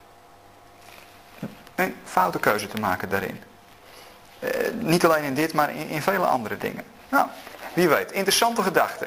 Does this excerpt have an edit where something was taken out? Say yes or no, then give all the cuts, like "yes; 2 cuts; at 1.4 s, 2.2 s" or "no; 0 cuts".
no; 0 cuts